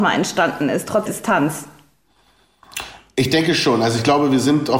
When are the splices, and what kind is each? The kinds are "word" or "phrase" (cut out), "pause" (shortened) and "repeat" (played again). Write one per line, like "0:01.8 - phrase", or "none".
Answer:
0:01.1 - word